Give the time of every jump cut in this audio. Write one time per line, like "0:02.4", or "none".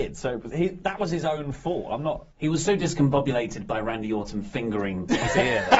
0:02.3